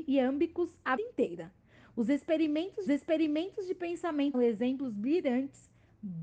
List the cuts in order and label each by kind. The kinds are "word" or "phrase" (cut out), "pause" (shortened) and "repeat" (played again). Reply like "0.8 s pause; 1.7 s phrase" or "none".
1.0 s word; 2.9 s repeat; 4.3 s phrase